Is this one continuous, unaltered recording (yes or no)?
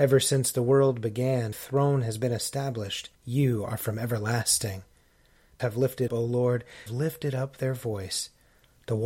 no